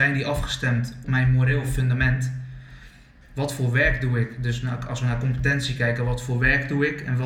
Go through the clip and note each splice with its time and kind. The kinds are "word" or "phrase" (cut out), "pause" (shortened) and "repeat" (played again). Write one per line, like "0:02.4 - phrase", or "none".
0:01.0 - word